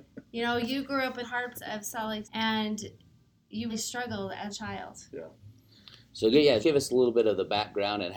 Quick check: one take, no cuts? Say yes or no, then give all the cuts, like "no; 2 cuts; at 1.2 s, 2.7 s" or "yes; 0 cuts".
no; 6 cuts; at 1.2 s, 1.5 s, 2.2 s, 3.7 s, 4.5 s, 6.6 s